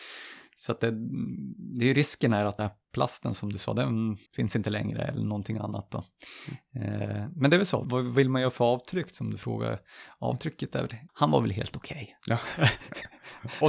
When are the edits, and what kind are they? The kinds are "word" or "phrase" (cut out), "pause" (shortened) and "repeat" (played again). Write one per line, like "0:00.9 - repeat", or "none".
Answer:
0:02.6 - word
0:04.3 - pause
0:07.8 - word
0:11.1 - word